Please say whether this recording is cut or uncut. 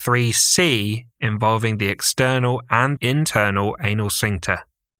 cut